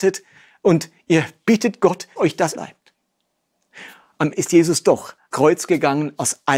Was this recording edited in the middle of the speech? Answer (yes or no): yes